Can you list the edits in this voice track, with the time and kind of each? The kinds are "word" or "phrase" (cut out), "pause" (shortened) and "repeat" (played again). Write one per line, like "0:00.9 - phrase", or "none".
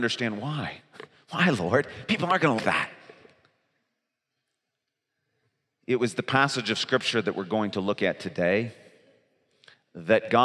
0:02.6 - word